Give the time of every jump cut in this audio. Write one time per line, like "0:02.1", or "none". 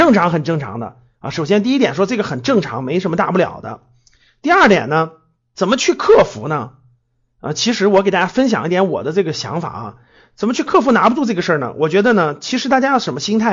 none